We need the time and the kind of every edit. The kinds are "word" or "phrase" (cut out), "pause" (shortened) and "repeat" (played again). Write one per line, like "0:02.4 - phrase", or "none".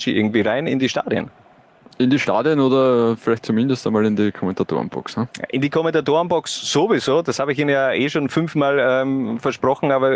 none